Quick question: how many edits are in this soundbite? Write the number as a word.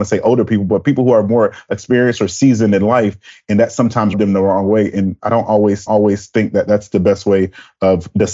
two